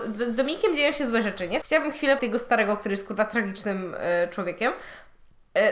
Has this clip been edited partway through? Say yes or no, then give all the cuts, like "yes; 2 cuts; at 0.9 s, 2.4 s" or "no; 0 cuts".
yes; 2 cuts; at 1.6 s, 2.2 s